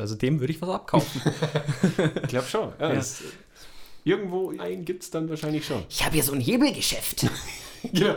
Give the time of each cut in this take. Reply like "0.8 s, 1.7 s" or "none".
4.6 s